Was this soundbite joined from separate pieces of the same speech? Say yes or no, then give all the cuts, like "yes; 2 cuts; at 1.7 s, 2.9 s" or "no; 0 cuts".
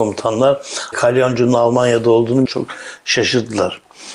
yes; 2 cuts; at 0.9 s, 2.5 s